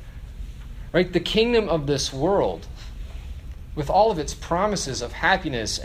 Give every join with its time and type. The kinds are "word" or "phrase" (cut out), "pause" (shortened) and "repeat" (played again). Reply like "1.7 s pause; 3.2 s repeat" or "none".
none